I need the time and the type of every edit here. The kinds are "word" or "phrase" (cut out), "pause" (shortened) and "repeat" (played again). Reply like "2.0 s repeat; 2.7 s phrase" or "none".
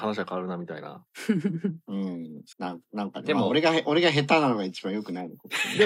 1.1 s pause; 2.5 s pause